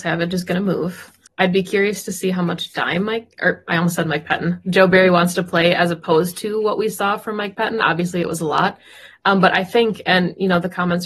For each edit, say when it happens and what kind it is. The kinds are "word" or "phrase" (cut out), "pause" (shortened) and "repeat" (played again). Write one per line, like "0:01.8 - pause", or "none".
0:01.3 - pause